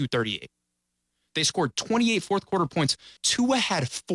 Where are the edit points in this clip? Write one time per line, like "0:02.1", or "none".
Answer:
0:03.2